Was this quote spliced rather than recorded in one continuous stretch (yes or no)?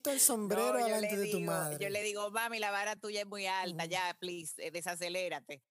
no